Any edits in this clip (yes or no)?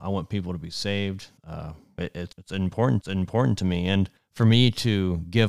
yes